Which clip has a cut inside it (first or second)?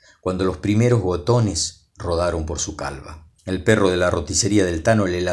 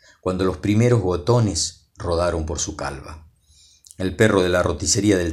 first